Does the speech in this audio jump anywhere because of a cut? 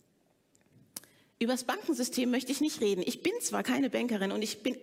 no; 0 cuts

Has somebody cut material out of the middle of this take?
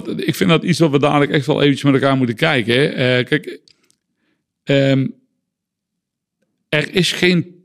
no; 0 cuts

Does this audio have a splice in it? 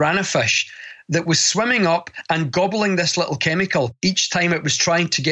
no; 0 cuts

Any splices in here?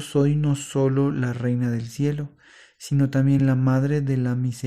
no; 0 cuts

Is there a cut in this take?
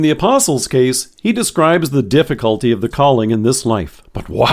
yes; 1 cut; at 2.9 s

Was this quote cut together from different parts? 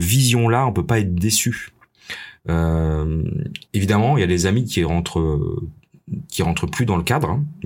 yes; 1 cut; at 3.7 s

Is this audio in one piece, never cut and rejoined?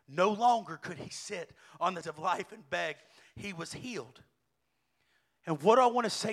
no; 2 cuts; at 1.1 s, 2.0 s

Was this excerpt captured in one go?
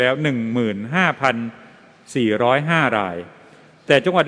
yes; 0 cuts

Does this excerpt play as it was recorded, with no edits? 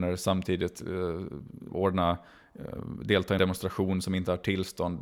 no; 2 cuts; at 1.7 s, 3.4 s

